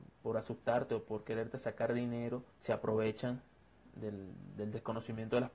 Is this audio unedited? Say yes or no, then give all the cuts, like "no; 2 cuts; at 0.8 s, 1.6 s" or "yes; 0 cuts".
no; 1 cut; at 2.5 s